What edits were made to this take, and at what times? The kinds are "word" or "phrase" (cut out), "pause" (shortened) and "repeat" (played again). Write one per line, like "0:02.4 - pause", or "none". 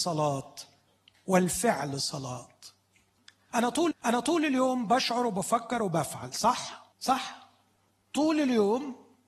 0:03.9 - repeat
0:06.9 - pause